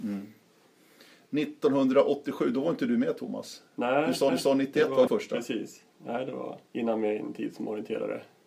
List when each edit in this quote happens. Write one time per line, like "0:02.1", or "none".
0:04.3
0:05.1
0:06.7